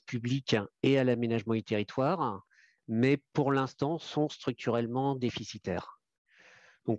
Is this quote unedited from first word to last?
yes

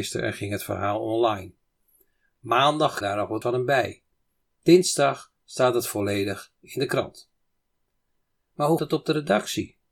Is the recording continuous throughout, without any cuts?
no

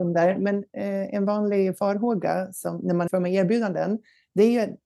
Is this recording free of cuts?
no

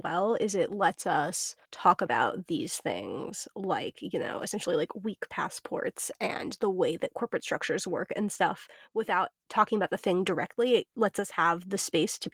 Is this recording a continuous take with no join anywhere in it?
no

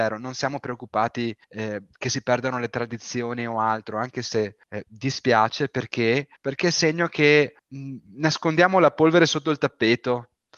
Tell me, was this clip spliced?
yes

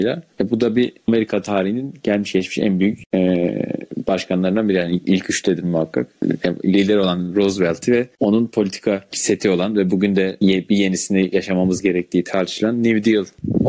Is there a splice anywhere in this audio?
no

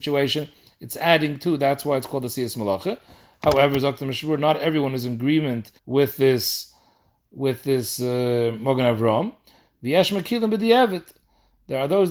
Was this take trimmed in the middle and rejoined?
yes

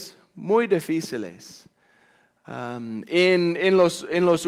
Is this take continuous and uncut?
yes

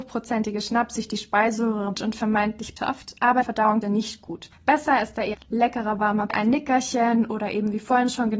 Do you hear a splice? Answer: yes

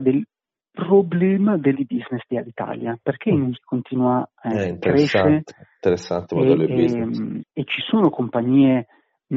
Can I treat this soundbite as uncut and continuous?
no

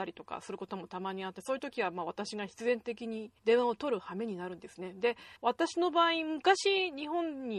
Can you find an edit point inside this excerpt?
yes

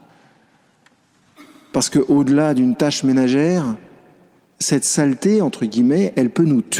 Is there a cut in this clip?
no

